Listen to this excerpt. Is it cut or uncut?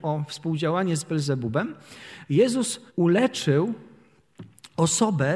cut